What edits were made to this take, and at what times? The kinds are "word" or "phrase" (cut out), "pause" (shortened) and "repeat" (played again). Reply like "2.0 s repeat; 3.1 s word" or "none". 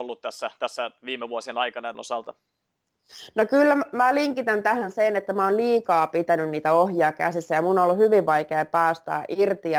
1.9 s phrase

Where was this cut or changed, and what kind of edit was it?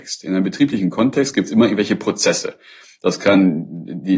none

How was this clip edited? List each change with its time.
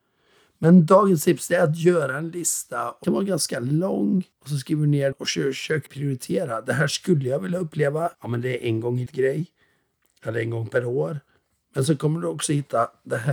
3.0 s word; 4.3 s pause; 5.1 s word; 5.9 s word; 8.1 s pause; 9.1 s word

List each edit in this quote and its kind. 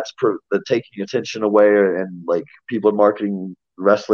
none

